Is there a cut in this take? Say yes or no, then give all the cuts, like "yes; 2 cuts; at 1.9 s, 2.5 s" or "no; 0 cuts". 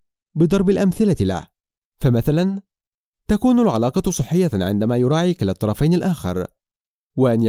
no; 0 cuts